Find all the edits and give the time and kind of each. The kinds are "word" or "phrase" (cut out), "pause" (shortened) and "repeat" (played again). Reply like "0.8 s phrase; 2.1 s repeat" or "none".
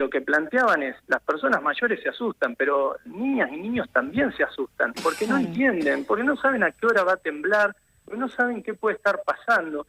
none